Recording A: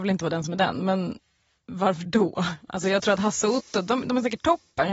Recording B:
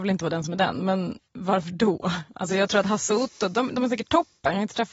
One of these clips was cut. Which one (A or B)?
B